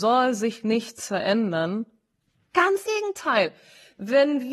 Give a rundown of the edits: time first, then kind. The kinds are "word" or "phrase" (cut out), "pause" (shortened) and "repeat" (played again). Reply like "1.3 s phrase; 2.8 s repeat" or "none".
2.9 s word